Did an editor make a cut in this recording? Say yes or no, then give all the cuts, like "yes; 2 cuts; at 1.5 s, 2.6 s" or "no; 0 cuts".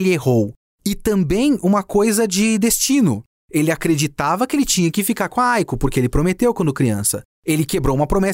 no; 0 cuts